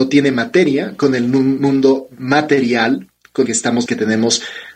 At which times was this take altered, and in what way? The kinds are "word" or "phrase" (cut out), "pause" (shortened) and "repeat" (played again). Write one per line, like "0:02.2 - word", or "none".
0:03.5 - word
0:03.9 - word